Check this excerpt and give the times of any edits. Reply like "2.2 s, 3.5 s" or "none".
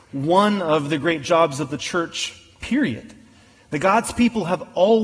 none